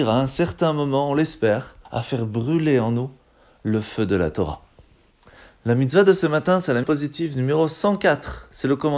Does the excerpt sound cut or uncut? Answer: cut